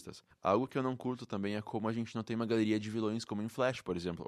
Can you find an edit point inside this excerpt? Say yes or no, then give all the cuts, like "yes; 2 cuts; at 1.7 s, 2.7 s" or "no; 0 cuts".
no; 0 cuts